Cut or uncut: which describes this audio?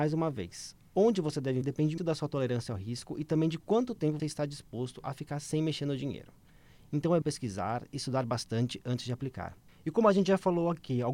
cut